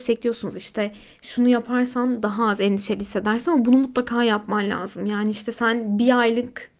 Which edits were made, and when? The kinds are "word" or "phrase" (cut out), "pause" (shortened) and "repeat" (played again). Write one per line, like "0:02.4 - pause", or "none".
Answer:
none